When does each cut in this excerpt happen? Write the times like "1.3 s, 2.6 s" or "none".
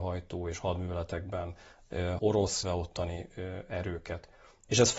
2.2 s, 2.6 s